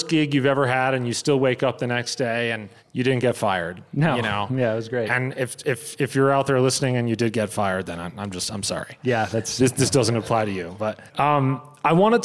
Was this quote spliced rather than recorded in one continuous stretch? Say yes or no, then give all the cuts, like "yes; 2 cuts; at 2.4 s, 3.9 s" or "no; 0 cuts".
yes; 2 cuts; at 2.8 s, 11.1 s